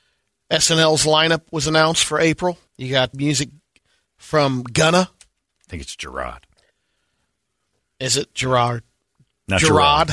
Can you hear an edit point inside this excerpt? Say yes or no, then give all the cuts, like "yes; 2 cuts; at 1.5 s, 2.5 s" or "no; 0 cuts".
yes; 2 cuts; at 2.7 s, 3.1 s